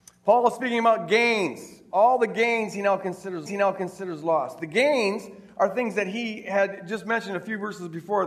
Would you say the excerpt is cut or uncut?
cut